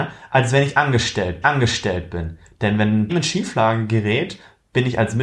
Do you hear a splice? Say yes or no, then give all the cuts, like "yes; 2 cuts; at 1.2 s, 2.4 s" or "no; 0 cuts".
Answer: yes; 2 cuts; at 1.4 s, 3.1 s